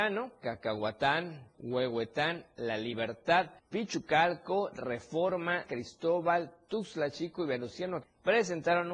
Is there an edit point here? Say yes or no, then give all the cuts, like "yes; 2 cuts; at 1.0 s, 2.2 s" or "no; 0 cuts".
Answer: yes; 4 cuts; at 1.5 s, 3.6 s, 5.7 s, 8.0 s